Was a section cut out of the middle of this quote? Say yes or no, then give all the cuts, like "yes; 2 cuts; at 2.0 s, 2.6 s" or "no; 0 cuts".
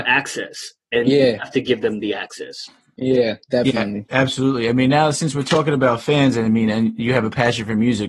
no; 0 cuts